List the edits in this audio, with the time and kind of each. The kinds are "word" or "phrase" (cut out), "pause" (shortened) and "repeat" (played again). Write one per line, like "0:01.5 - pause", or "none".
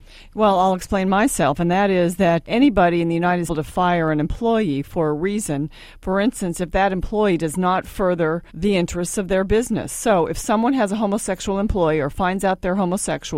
0:02.4 - word
0:03.5 - phrase
0:08.5 - pause

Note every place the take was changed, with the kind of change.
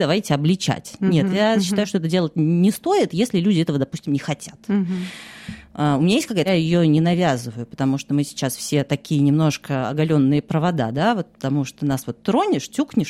0:06.5 - phrase

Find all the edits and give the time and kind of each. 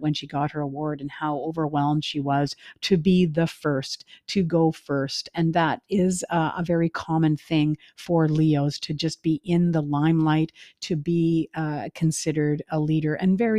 none

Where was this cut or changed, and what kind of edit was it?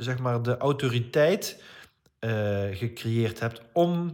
none

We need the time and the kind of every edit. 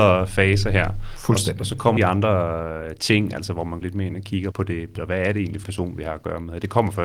0:02.0 - word
0:03.8 - word
0:04.5 - word
0:05.0 - word
0:05.6 - word

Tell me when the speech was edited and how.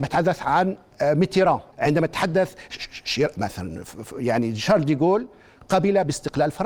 0:01.7 - pause

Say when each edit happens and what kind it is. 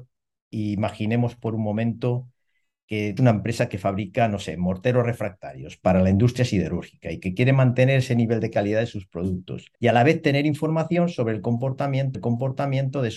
0:03.2 - word
0:09.7 - pause
0:12.1 - repeat

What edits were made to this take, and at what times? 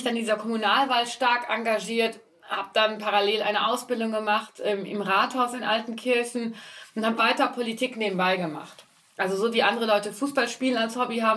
0:07.2 - word

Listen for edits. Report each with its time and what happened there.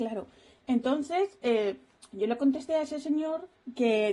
none

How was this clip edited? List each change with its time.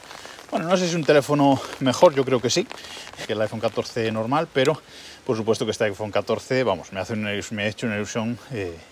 0:03.2 - word

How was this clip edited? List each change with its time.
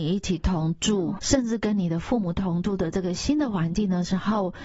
0:01.2 - word

